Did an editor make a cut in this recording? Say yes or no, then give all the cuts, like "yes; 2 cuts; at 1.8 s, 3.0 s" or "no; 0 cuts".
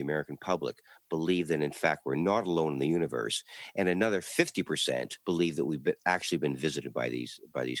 yes; 1 cut; at 5.2 s